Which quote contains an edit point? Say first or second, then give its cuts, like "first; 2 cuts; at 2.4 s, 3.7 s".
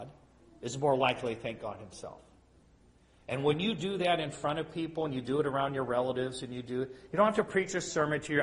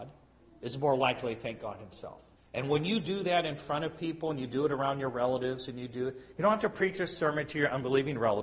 second; 1 cut; at 2.4 s